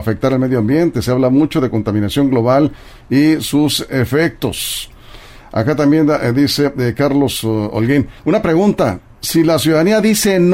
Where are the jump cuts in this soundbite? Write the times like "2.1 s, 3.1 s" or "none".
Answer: 8.2 s

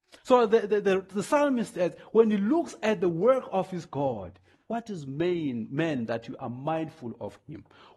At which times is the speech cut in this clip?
none

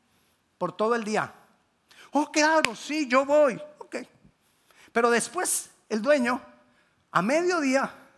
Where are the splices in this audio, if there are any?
none

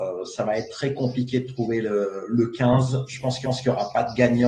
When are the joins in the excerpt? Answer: 3.4 s

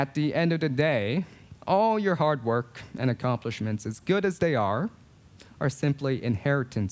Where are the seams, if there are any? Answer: 1.6 s

